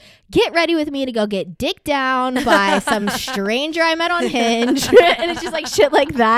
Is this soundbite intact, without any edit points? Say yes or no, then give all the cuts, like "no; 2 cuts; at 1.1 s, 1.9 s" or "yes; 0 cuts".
yes; 0 cuts